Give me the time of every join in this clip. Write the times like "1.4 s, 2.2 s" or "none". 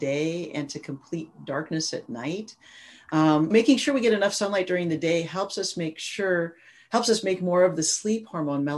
3.5 s

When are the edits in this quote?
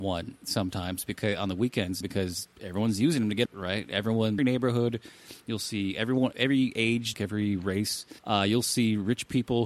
2.0 s, 3.5 s, 4.4 s, 6.3 s, 7.1 s, 8.2 s

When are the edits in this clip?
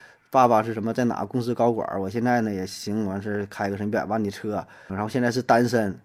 4.9 s

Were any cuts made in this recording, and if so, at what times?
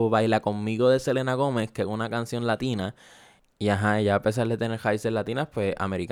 none

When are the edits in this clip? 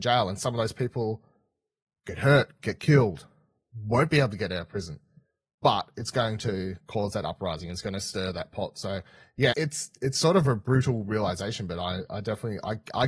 9.5 s

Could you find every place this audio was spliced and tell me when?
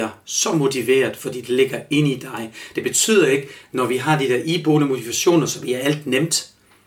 none

